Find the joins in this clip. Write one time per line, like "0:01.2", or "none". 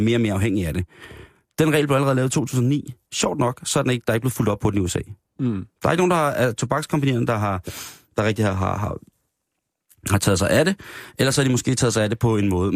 none